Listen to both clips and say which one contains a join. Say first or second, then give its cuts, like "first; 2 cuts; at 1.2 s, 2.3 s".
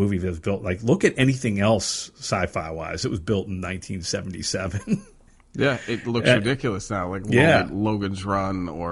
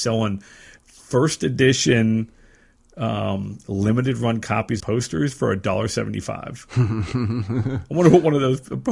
second; 1 cut; at 4.8 s